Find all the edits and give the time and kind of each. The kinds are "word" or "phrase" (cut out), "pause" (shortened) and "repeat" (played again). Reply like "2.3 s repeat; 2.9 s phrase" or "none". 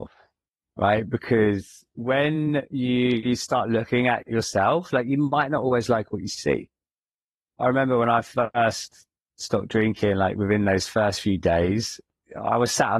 none

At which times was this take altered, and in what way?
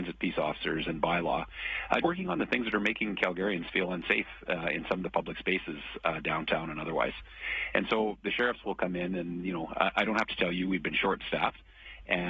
2.0 s word

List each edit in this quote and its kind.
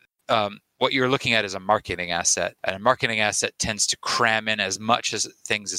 2.6 s pause

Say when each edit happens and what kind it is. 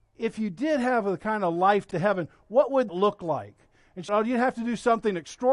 1.9 s word; 2.9 s word; 4.1 s word

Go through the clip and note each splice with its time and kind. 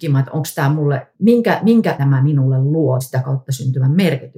1.1 s pause; 2.0 s word; 3.0 s word

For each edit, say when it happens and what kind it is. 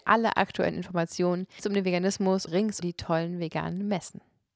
1.6 s word; 2.5 s word; 2.8 s word

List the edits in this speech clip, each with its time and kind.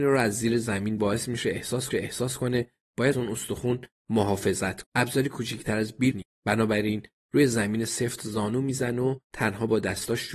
1.0 s phrase; 1.9 s repeat; 3.1 s word; 4.8 s word; 6.1 s word; 9.2 s pause

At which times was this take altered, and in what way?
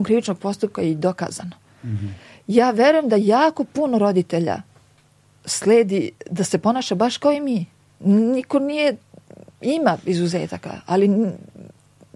none

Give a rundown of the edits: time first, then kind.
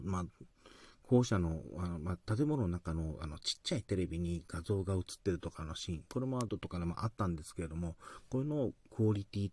6.5 s word

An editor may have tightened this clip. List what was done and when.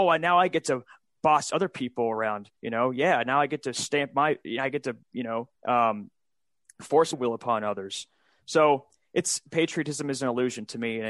2.6 s pause; 5.0 s pause; 5.6 s pause; 7.1 s phrase

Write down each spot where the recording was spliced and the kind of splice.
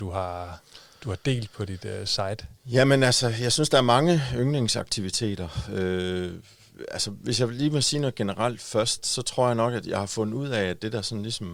2.6 s pause; 9.0 s word

